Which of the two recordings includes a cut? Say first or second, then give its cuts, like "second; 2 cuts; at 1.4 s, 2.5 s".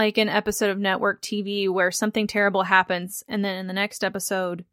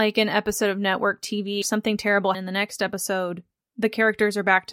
second; 2 cuts; at 1.6 s, 2.3 s